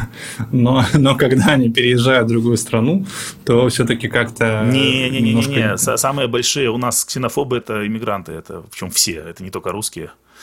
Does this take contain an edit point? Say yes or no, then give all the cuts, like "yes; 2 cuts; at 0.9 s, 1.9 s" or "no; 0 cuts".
yes; 1 cut; at 7.6 s